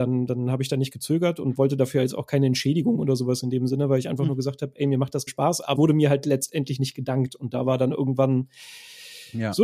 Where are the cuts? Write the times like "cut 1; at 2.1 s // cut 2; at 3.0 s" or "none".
cut 1; at 5.3 s // cut 2; at 5.7 s